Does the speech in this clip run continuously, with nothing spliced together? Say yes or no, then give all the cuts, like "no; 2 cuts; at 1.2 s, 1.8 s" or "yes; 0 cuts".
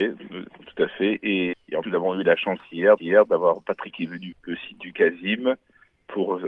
no; 5 cuts; at 1.5 s, 1.8 s, 3.0 s, 3.9 s, 4.3 s